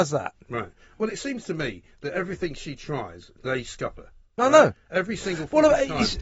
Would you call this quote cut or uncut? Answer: uncut